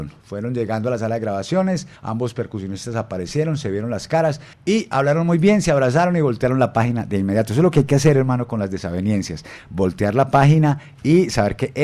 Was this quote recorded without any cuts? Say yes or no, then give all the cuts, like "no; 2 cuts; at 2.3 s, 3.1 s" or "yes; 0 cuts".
no; 2 cuts; at 2.0 s, 4.5 s